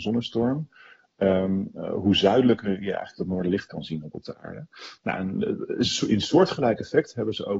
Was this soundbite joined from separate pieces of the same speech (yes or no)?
yes